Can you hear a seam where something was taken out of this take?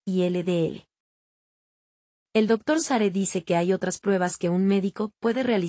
no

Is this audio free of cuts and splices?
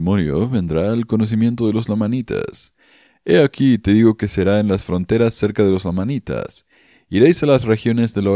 yes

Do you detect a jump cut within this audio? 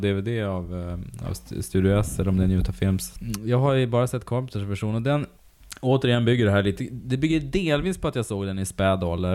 no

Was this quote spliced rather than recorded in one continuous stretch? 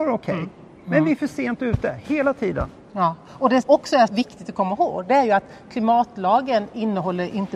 yes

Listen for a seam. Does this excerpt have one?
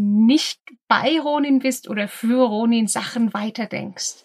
no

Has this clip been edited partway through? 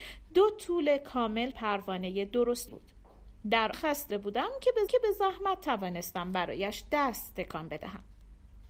yes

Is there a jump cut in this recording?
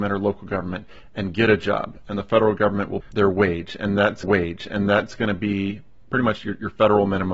yes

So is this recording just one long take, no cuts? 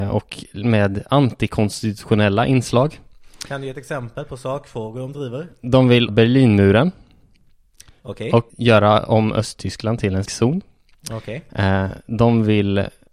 no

